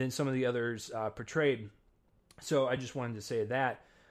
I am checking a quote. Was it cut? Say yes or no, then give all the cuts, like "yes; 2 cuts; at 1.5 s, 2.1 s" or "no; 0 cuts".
no; 0 cuts